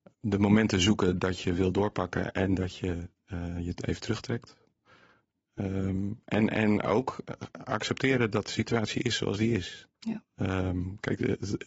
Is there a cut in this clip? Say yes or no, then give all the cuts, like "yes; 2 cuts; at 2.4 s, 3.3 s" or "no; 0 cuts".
yes; 1 cut; at 9.9 s